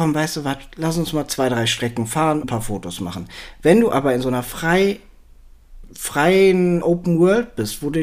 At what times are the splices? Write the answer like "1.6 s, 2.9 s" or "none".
2.4 s, 6.8 s